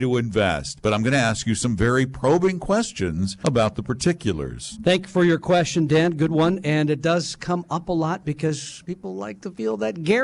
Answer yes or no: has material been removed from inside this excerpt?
no